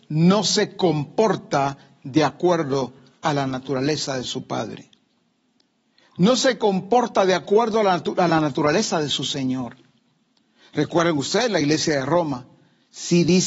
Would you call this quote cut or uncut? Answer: uncut